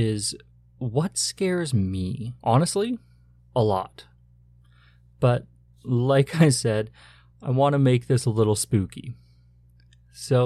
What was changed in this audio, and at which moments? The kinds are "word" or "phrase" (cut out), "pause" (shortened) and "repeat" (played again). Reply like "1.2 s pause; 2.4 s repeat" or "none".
2.4 s pause